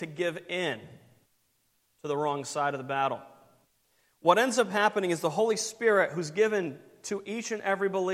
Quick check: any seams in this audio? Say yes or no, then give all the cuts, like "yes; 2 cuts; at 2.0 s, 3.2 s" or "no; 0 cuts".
no; 0 cuts